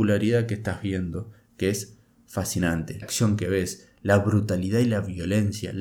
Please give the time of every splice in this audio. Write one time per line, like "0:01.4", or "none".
0:03.0

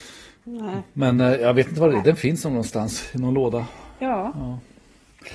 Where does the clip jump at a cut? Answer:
none

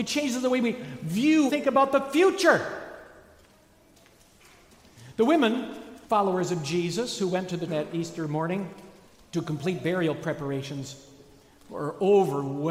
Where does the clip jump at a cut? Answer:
0:01.5
0:06.0
0:07.7
0:09.0

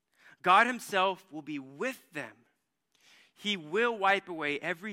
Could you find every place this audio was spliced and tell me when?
none

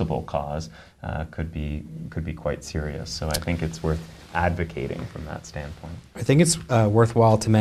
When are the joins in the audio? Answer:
0:06.1

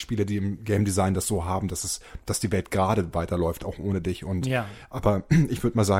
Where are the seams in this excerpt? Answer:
none

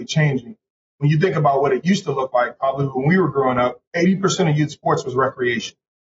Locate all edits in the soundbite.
0:03.9

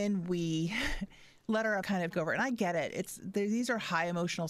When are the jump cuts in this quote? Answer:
0:01.8
0:02.1

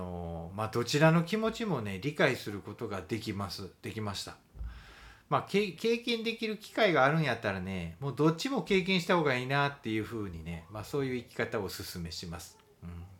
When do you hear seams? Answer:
0:05.8

